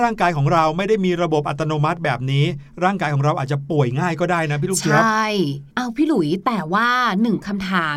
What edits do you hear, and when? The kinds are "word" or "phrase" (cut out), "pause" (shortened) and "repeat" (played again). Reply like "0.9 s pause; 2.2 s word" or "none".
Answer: 5.7 s pause